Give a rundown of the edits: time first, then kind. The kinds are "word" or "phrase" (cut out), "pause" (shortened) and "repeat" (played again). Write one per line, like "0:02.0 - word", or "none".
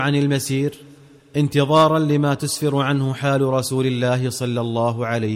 none